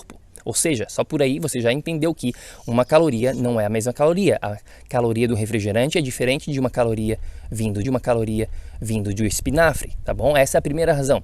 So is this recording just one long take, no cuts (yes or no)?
no